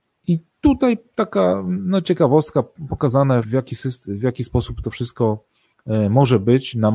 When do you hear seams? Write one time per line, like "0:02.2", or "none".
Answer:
0:03.4

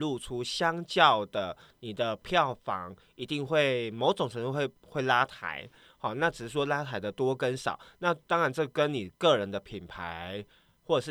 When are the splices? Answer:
none

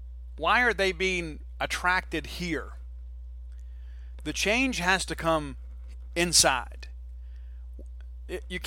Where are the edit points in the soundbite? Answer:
none

